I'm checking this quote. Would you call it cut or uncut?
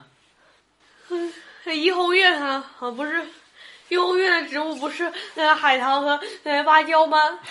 uncut